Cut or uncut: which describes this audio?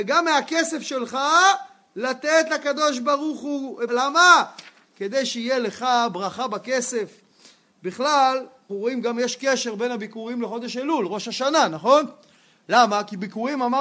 cut